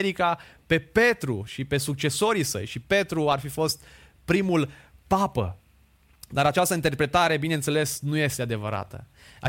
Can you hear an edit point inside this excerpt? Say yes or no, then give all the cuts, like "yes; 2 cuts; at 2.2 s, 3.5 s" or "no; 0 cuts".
no; 0 cuts